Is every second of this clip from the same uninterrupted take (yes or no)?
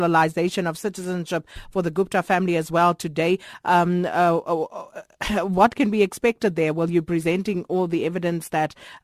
yes